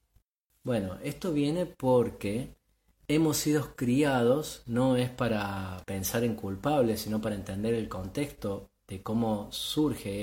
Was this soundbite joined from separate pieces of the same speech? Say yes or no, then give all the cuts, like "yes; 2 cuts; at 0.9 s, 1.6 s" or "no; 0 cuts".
no; 0 cuts